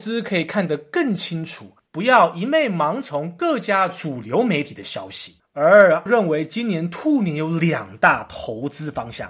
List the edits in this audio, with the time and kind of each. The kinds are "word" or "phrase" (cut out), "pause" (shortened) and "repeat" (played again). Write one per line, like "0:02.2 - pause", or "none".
0:06.1 - word